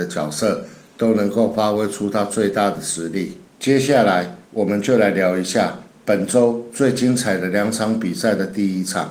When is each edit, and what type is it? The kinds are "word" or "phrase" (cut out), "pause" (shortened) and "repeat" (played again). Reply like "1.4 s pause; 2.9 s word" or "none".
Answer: 3.5 s pause; 4.4 s pause